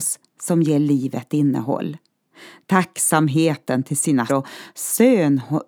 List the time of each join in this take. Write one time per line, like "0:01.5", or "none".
0:04.3